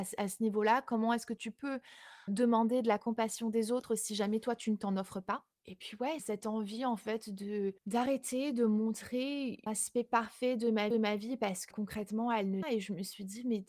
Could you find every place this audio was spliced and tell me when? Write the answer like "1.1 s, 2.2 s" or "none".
2.3 s, 6.2 s, 7.8 s, 9.7 s, 10.9 s, 11.7 s, 12.6 s